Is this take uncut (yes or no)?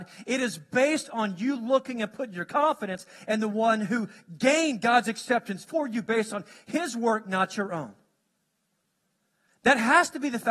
yes